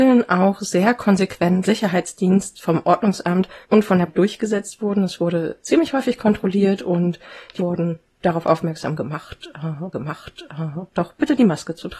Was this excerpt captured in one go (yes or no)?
no